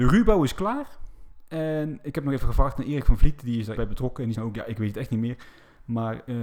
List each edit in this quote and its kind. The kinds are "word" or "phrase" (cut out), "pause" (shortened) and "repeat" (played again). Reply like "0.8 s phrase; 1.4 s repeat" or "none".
3.8 s word; 4.3 s word